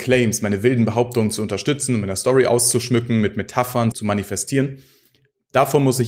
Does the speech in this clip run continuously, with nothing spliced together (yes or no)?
no